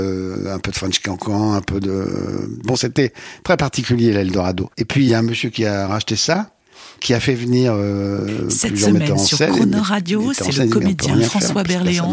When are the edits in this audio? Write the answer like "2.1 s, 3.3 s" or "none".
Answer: 2.6 s, 5.1 s, 7.0 s